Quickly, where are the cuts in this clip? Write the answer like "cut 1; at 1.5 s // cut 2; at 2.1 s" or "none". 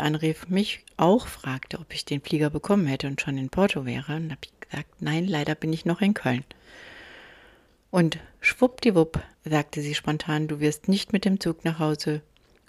cut 1; at 9.3 s